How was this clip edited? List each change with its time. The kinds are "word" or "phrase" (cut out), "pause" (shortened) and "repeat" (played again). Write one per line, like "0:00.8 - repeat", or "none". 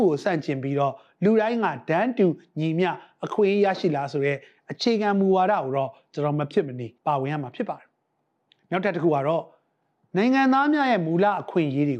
0:07.0 - pause
0:10.0 - pause